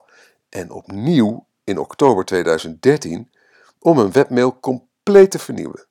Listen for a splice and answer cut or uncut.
uncut